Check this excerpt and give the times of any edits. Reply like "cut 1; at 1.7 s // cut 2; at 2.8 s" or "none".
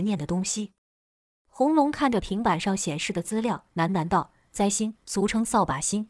cut 1; at 3.7 s // cut 2; at 5.0 s

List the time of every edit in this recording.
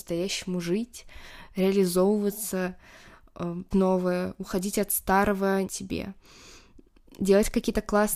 cut 1; at 3.7 s // cut 2; at 5.6 s

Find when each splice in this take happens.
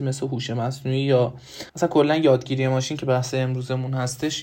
cut 1; at 1.7 s

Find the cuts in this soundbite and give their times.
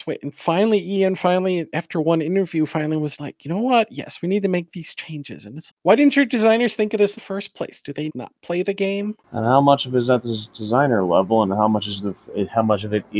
cut 1; at 3.2 s // cut 2; at 5.7 s // cut 3; at 7.2 s // cut 4; at 8.1 s // cut 5; at 9.2 s

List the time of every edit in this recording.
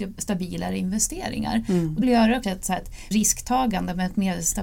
cut 1; at 2.0 s // cut 2; at 2.4 s // cut 3; at 3.1 s

